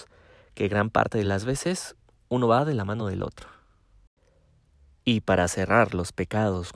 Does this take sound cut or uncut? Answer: uncut